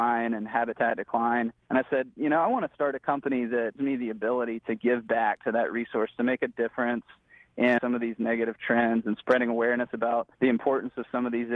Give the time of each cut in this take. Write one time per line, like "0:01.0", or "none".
0:01.6
0:03.8
0:07.8
0:10.3

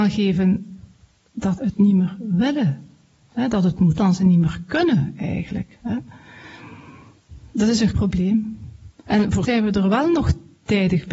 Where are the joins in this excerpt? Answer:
0:01.6
0:04.0
0:07.9
0:09.4

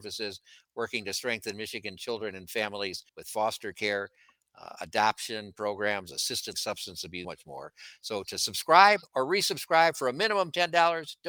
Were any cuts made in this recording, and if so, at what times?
0:03.1
0:06.5
0:07.2

